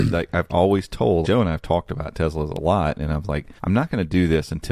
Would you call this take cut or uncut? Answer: cut